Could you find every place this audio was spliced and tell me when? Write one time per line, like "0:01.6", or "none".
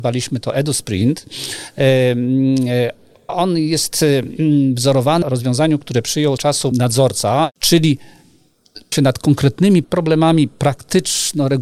0:03.3
0:05.2
0:06.4
0:06.7
0:08.9
0:09.8

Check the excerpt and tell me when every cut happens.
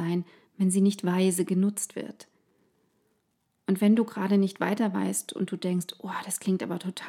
none

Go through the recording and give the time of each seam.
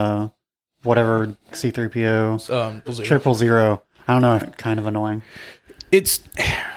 0:01.5
0:02.9
0:04.4

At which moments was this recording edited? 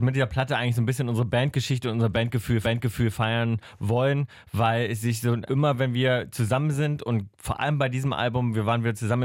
0:02.6
0:05.5

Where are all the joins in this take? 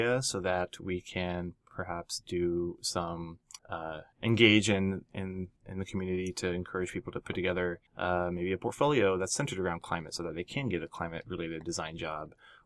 0:03.6

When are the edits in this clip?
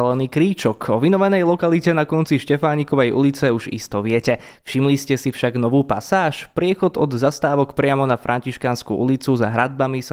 none

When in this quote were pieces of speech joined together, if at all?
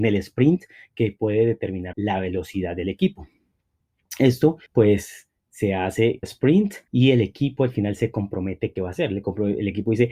0:01.9
0:04.7
0:06.2
0:06.9
0:08.8

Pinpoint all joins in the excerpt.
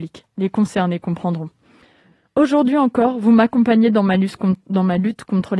none

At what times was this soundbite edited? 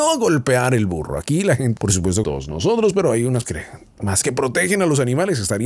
0:01.8
0:02.2
0:03.4
0:04.2

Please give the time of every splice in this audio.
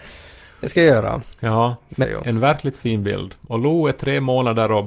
0:02.0

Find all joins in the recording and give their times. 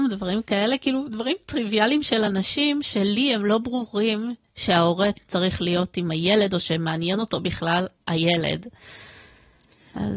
none

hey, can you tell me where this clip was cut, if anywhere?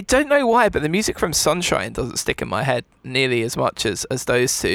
none

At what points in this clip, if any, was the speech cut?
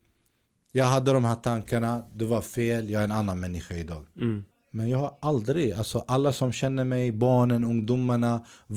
0:04.5

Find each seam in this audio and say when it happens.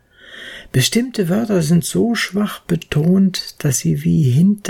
none

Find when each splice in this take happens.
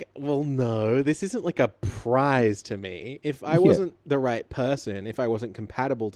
none

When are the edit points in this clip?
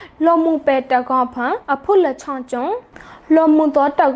0:01.6

